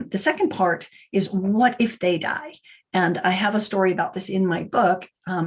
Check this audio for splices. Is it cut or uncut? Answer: uncut